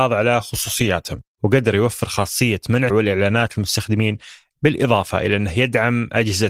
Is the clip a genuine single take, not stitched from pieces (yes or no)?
no